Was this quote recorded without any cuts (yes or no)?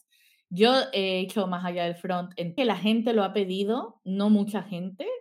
no